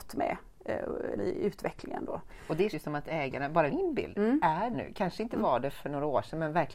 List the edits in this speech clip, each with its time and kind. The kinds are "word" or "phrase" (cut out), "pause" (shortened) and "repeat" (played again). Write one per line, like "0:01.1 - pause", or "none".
0:01.2 - word
0:02.7 - word
0:03.7 - word
0:04.7 - word